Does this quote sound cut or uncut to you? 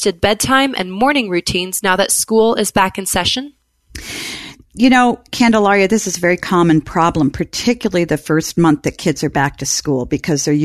uncut